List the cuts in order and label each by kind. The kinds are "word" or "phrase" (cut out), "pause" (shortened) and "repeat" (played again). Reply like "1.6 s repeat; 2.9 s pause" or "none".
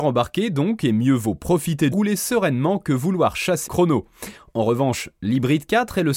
1.9 s phrase; 3.7 s word